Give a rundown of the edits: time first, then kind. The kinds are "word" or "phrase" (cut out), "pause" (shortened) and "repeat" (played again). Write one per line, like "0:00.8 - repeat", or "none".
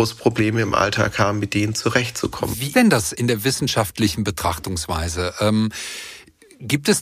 0:02.7 - word
0:03.1 - phrase